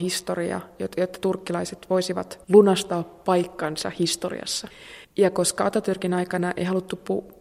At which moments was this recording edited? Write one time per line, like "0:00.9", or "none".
0:02.4
0:05.0